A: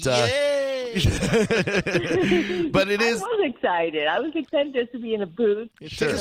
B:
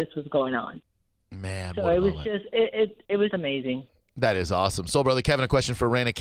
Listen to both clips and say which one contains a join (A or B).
B